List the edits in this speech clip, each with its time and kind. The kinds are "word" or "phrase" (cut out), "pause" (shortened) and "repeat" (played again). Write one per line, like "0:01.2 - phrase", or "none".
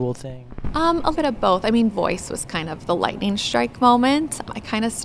0:01.1 - word
0:01.9 - word